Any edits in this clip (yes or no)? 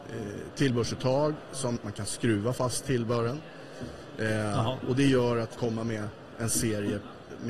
yes